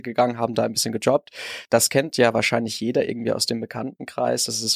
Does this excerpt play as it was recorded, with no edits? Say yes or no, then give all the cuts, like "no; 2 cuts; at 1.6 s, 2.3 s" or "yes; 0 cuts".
yes; 0 cuts